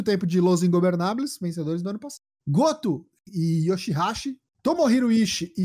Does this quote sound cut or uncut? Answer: uncut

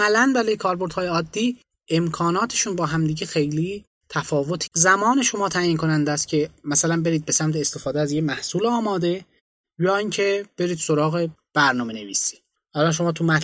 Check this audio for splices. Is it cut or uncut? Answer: cut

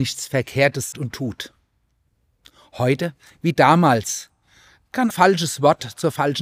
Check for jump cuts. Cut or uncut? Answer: cut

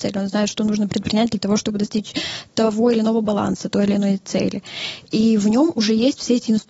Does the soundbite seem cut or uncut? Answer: uncut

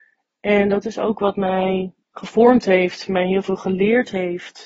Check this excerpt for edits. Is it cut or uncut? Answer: cut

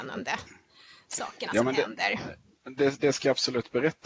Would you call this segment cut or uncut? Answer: uncut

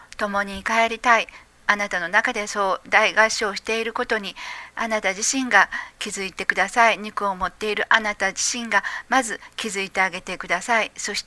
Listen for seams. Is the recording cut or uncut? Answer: uncut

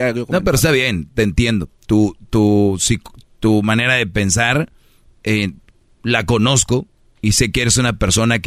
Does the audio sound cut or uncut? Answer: uncut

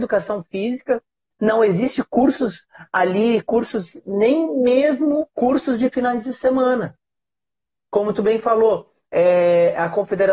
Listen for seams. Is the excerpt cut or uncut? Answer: uncut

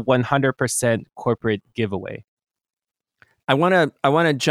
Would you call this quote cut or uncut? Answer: uncut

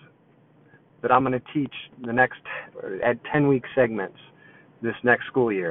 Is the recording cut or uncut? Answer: uncut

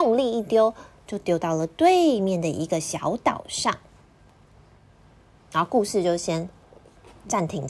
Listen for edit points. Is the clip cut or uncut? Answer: uncut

